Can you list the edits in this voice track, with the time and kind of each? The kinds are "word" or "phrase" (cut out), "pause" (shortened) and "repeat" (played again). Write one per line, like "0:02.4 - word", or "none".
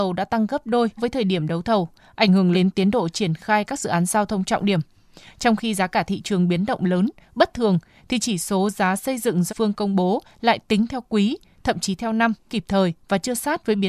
0:01.0 - word
0:02.5 - word
0:09.5 - word
0:12.5 - word